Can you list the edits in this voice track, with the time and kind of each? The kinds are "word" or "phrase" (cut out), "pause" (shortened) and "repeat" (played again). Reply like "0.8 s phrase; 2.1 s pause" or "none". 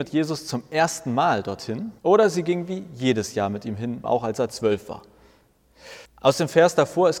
2.0 s pause; 4.0 s word; 6.1 s pause